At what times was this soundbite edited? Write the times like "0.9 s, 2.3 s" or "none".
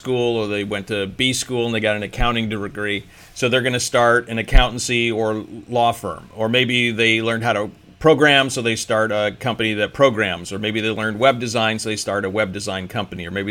none